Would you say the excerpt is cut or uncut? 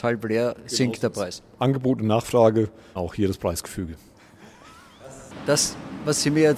cut